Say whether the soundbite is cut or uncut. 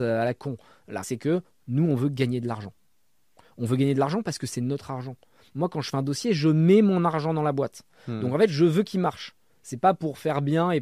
cut